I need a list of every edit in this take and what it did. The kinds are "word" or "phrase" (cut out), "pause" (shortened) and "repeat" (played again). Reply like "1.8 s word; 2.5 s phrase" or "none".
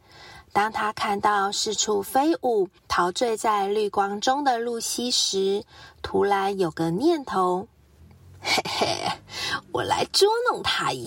2.8 s pause; 8.0 s pause